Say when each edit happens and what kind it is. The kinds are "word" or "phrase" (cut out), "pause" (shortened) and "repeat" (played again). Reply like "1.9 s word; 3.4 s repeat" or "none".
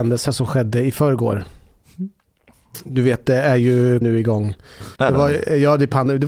4.0 s word; 5.0 s pause